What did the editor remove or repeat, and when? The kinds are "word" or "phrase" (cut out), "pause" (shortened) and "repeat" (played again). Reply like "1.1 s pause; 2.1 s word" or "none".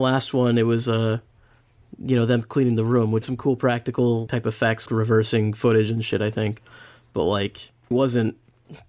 3.2 s word; 4.3 s word; 4.9 s word; 7.9 s word